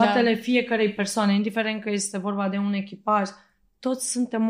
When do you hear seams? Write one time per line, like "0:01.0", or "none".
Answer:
none